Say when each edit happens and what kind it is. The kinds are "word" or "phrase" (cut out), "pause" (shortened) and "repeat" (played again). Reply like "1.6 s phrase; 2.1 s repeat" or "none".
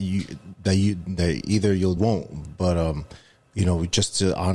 2.0 s phrase